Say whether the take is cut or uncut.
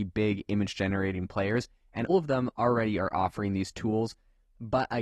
cut